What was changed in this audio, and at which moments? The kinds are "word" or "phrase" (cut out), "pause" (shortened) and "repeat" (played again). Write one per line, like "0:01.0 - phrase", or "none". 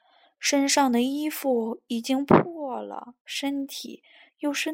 0:03.2 - pause

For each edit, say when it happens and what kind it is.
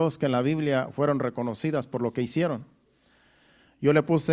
none

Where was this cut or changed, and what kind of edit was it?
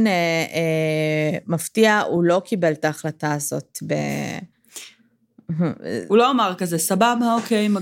none

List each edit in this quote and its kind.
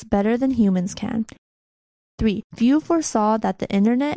0:02.5 - pause

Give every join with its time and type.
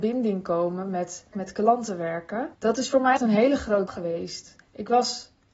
0:01.3 - word
0:02.5 - pause
0:03.2 - word
0:03.9 - word
0:04.6 - pause

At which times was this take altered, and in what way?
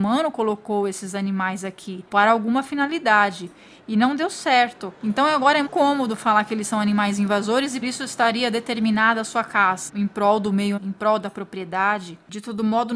0:05.7 - word
0:07.8 - word
0:09.9 - word
0:10.8 - word

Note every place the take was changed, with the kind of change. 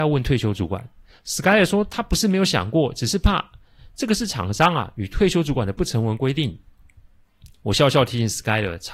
none

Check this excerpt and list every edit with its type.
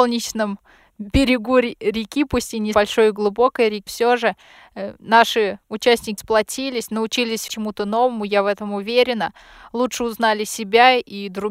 0:02.7 - word
0:03.9 - word
0:06.2 - word
0:07.5 - word

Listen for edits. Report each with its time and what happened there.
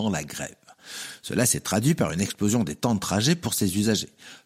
none

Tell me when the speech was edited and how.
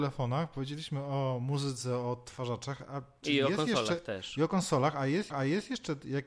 0:05.3 - repeat

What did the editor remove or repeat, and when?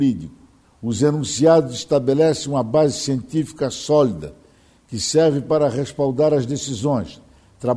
none

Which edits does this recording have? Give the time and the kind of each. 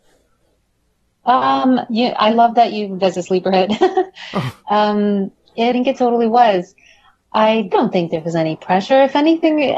0:03.0 - phrase
0:05.7 - word
0:07.7 - phrase

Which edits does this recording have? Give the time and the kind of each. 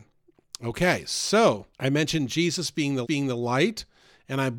0:01.7 - pause
0:03.0 - repeat

